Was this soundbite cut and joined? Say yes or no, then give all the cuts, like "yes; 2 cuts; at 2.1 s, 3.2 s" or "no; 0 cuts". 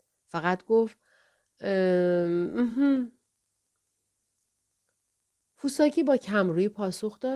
no; 0 cuts